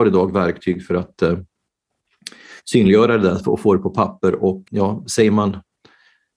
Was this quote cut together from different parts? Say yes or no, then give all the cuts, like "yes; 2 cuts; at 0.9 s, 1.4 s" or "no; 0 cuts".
yes; 2 cuts; at 2.6 s, 4.7 s